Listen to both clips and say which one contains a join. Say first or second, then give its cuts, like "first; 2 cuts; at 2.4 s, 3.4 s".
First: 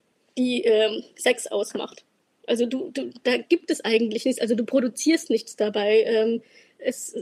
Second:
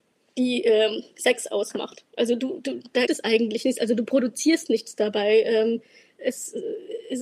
second; 2 cuts; at 2.1 s, 3.1 s